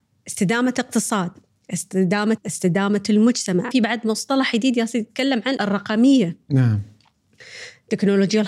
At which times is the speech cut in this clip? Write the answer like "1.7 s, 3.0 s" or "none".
2.4 s, 3.7 s, 5.6 s